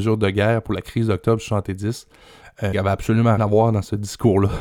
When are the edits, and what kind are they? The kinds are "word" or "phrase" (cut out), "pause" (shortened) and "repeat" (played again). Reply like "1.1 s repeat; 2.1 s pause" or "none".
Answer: 2.7 s word; 3.4 s word